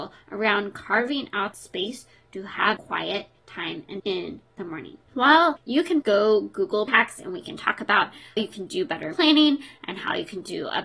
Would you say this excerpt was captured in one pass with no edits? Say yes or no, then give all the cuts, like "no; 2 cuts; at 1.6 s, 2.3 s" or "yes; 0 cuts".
no; 8 cuts; at 1.5 s, 2.8 s, 4.0 s, 5.6 s, 6.0 s, 6.9 s, 8.4 s, 9.1 s